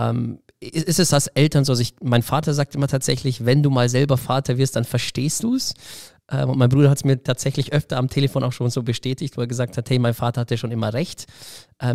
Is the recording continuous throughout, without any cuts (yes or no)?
yes